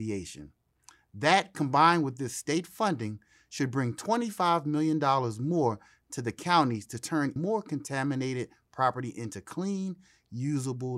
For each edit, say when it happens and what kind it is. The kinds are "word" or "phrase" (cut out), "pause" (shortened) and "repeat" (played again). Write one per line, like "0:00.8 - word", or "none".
0:07.4 - word